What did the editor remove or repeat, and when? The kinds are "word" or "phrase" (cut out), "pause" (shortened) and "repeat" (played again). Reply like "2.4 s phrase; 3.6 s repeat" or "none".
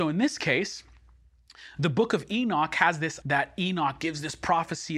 3.2 s word